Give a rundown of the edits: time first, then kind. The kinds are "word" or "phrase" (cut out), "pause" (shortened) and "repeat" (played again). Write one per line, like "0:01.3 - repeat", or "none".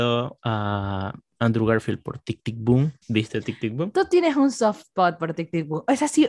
0:03.0 - pause